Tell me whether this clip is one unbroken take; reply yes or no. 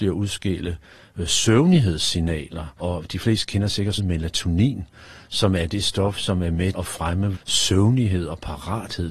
no